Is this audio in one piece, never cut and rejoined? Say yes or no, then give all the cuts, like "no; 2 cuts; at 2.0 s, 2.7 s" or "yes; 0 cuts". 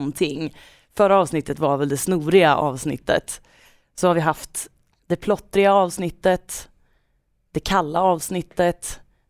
yes; 0 cuts